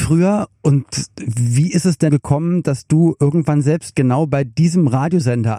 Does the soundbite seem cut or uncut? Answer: cut